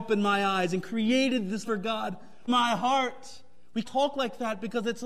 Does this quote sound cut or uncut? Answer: cut